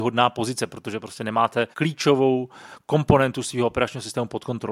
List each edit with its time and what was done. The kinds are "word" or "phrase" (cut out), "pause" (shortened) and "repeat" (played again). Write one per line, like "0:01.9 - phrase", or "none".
0:01.7 - pause